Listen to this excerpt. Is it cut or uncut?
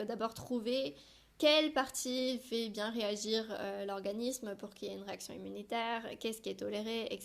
uncut